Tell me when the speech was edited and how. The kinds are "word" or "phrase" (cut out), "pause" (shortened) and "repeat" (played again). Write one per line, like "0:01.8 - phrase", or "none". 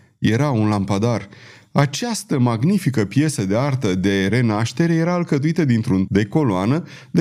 0:06.1 - word